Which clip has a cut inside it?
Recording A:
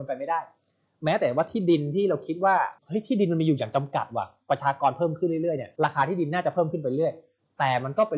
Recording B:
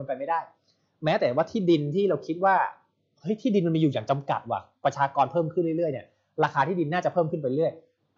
A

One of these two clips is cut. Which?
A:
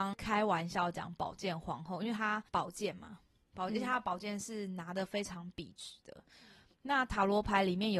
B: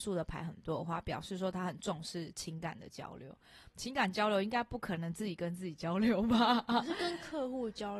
A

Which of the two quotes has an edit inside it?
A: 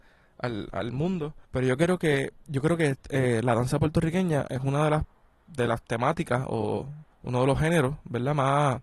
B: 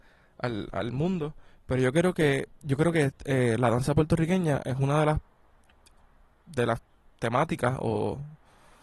A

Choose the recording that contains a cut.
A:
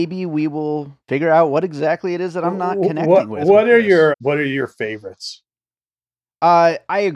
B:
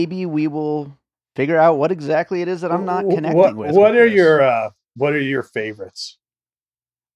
A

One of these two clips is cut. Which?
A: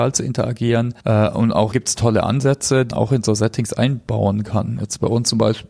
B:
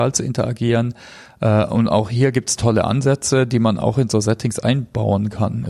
A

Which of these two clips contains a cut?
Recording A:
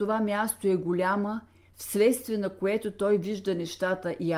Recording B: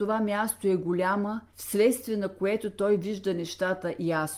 B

